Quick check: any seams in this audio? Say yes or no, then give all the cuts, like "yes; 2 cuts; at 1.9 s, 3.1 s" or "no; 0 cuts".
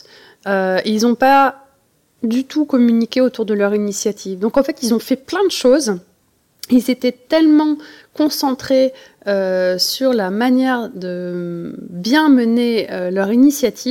no; 0 cuts